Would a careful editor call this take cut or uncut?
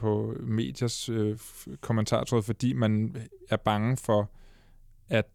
uncut